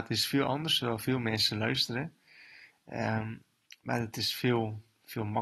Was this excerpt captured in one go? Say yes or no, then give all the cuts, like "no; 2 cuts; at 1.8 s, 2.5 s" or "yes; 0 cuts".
yes; 0 cuts